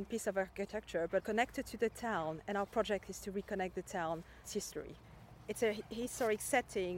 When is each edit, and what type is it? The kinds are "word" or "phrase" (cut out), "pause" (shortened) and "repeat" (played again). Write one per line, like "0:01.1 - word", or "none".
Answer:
0:01.2 - word
0:04.4 - word